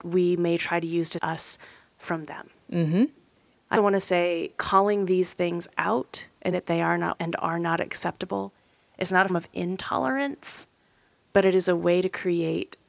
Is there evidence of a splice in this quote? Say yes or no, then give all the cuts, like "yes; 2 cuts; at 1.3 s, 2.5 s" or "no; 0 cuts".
yes; 6 cuts; at 1.2 s, 3.7 s, 4.6 s, 6.5 s, 7.1 s, 9.3 s